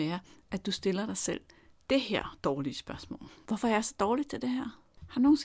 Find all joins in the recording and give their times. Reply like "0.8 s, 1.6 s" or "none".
none